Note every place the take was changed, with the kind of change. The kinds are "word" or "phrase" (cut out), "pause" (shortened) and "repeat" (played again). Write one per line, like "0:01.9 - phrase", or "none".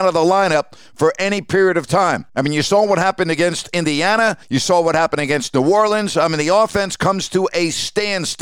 0:02.3 - pause
0:04.4 - pause